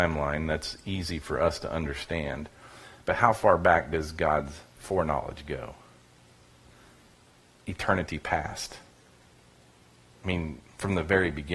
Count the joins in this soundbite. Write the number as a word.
zero